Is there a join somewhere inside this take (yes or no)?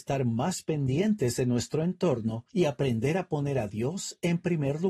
yes